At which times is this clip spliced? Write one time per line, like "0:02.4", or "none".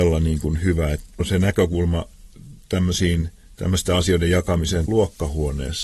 0:01.2
0:04.9